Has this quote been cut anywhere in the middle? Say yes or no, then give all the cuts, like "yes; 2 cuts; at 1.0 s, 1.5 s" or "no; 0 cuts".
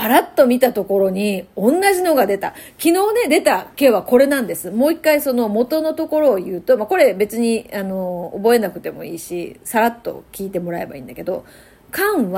yes; 1 cut; at 3.7 s